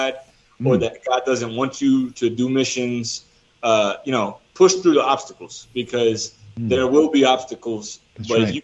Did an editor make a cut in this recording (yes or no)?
no